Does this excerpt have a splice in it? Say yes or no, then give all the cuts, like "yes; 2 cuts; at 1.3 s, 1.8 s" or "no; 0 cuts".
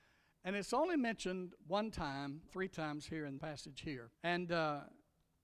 yes; 4 cuts; at 1.6 s, 2.5 s, 3.4 s, 4.1 s